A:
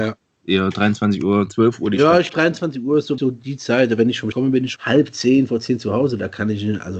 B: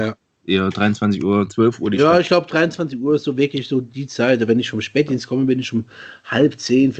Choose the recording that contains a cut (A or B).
A